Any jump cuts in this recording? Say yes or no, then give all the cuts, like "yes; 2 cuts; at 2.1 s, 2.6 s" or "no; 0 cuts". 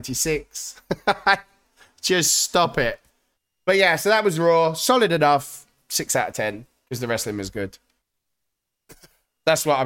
no; 0 cuts